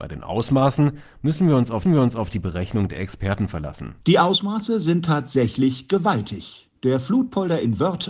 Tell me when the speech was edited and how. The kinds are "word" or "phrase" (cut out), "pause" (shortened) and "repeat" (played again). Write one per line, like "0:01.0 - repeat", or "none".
0:01.9 - repeat
0:04.0 - pause